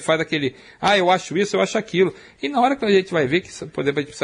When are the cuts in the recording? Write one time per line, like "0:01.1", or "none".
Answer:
none